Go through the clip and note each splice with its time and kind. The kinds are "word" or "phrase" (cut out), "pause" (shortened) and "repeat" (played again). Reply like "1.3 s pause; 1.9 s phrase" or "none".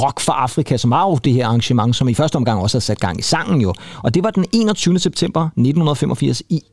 none